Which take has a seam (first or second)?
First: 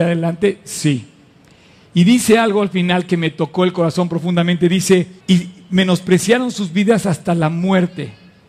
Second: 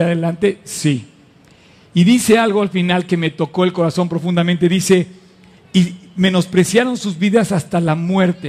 first